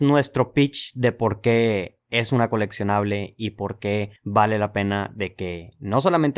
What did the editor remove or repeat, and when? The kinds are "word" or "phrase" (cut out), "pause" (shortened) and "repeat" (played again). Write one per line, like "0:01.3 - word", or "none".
none